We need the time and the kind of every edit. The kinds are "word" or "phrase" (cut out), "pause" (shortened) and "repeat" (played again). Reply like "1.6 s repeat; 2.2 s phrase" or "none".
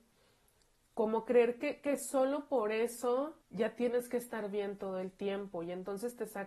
3.4 s pause